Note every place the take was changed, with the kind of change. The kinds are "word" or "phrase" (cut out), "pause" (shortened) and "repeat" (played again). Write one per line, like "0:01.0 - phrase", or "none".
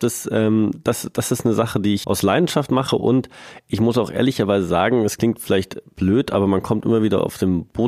0:02.0 - word